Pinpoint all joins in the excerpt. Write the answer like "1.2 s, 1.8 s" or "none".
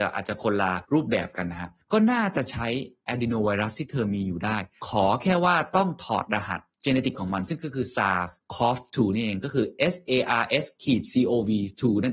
7.1 s

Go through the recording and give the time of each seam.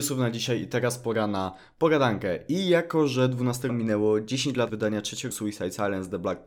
3.7 s, 4.7 s, 5.3 s

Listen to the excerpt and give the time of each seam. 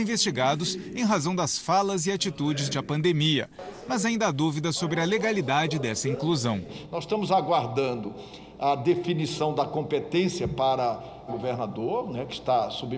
2.7 s, 11.3 s

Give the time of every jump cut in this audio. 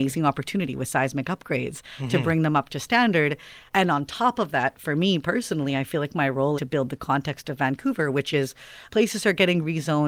3.7 s, 6.6 s, 8.9 s

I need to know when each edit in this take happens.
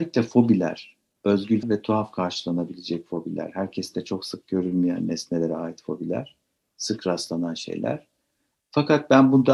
1.6 s

